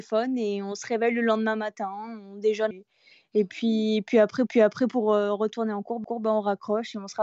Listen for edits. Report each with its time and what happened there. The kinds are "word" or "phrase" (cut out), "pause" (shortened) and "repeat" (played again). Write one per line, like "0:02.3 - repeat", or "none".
0:02.7 - word
0:04.5 - repeat
0:06.0 - repeat

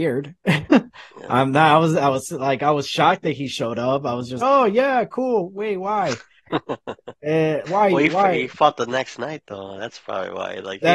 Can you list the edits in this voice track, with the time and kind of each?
0:04.4 - word
0:07.7 - word

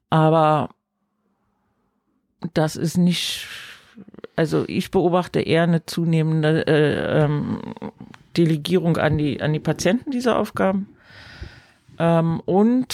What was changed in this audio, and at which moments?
none

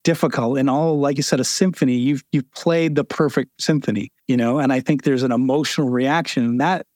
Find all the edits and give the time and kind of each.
0:04.2 - pause

